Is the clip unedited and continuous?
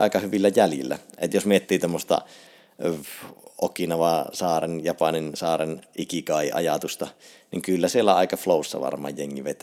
yes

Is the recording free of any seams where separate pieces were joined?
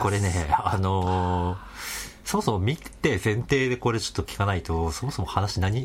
yes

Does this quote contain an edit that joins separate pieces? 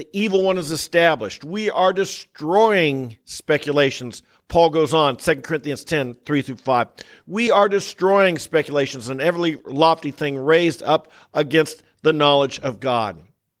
no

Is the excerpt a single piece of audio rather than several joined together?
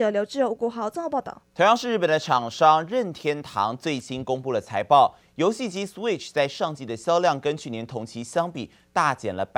no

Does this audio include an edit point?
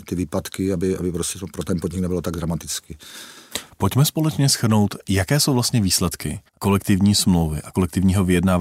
yes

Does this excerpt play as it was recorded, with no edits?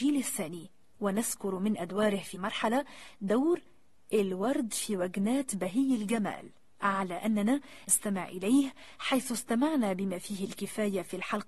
no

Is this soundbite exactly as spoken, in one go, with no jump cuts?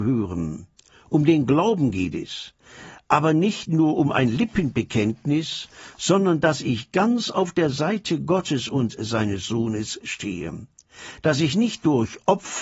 yes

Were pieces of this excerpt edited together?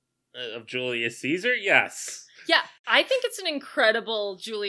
no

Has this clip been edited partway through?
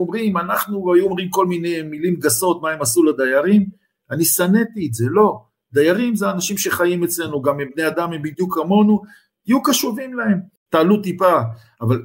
no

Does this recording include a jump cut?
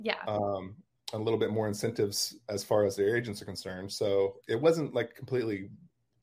yes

